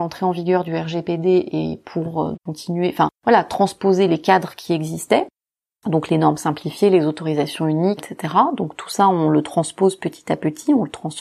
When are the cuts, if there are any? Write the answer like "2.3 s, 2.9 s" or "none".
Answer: 2.3 s, 8.0 s